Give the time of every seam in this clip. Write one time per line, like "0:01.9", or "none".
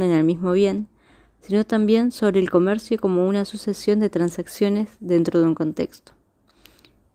none